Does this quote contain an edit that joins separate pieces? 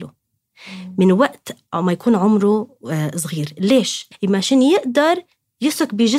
no; 0 cuts

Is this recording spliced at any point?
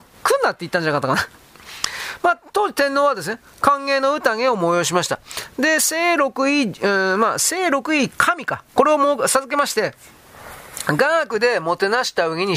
no; 0 cuts

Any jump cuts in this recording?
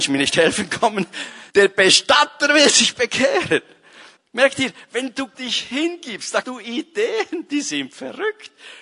yes; 4 cuts; at 1.5 s, 4.2 s, 5.3 s, 6.4 s

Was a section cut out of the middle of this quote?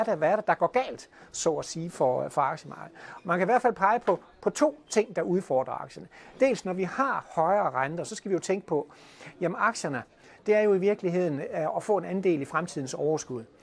no; 0 cuts

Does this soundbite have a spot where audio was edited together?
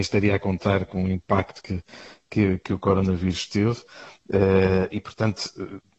no; 0 cuts

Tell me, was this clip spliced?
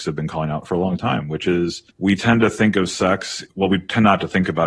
yes; 2 cuts; at 1.9 s, 3.5 s

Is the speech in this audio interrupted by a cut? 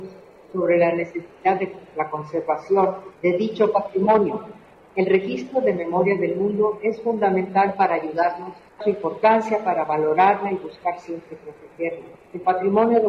yes; 2 cuts; at 3.1 s, 8.8 s

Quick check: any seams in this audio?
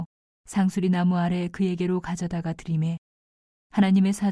no; 0 cuts

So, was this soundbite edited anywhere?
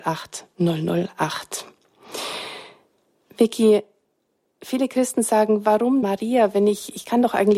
yes; 1 cut; at 6.0 s

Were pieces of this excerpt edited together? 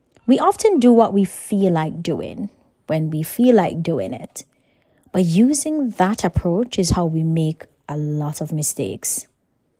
no; 0 cuts

